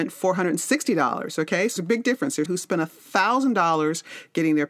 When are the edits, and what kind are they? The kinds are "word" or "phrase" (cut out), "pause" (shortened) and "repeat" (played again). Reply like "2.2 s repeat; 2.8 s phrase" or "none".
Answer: 1.8 s word; 2.5 s word